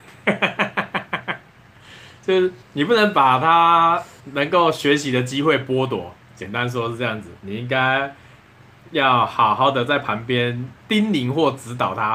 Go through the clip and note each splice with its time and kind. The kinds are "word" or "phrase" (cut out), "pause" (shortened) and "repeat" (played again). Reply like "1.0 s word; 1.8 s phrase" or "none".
2.6 s pause; 4.2 s pause; 10.8 s pause

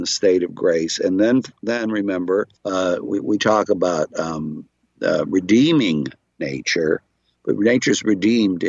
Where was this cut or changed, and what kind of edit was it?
2.6 s pause

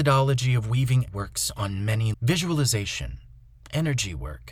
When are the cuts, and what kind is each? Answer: 1.1 s word; 2.1 s word

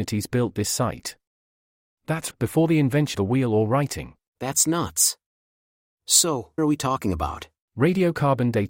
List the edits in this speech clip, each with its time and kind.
2.3 s word; 3.1 s word; 6.6 s word

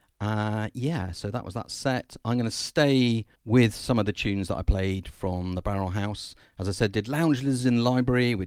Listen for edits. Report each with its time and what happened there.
3.4 s pause

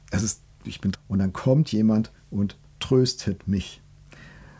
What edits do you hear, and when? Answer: 0.9 s word

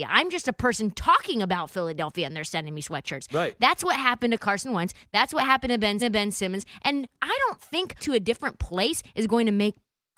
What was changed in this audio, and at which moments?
6.0 s repeat; 8.0 s word

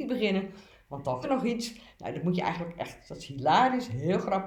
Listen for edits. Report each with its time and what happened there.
1.2 s word

